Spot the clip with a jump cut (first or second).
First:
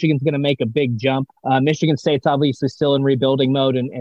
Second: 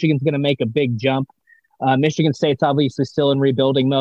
first